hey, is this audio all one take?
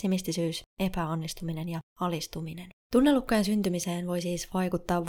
no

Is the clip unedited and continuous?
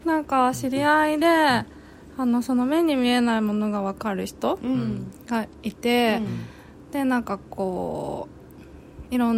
no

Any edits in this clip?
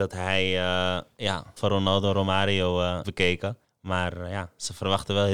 yes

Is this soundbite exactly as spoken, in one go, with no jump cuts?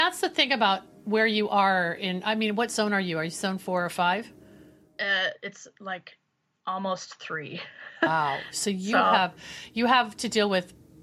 yes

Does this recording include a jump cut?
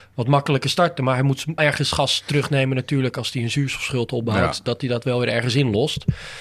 yes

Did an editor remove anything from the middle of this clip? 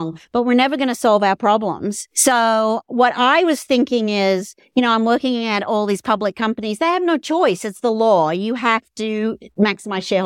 yes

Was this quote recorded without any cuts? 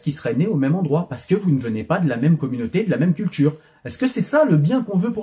yes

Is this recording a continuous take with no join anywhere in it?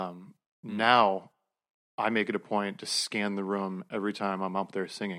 yes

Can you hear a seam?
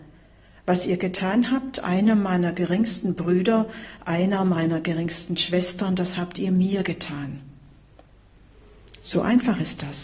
no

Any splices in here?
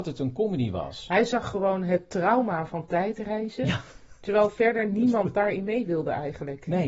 no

